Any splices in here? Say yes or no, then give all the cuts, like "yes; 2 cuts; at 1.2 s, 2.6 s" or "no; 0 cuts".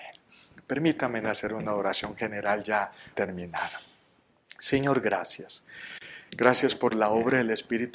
yes; 1 cut; at 3.1 s